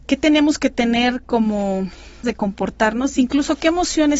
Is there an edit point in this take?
yes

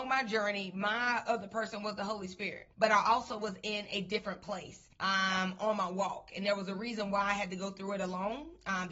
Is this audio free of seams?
no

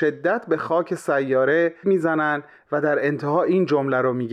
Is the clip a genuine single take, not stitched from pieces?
no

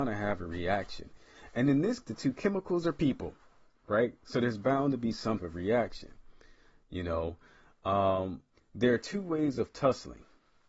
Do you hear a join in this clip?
yes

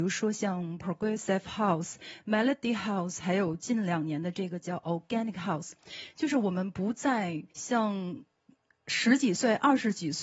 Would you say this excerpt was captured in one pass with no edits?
no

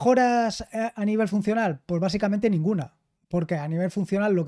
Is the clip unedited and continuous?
yes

